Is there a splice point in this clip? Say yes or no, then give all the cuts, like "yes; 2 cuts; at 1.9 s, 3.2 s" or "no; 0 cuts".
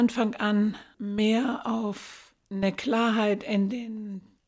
no; 0 cuts